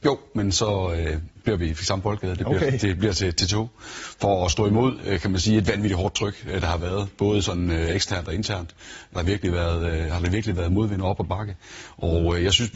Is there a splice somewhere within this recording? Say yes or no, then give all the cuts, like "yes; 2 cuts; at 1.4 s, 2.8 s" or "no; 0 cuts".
yes; 1 cut; at 9.2 s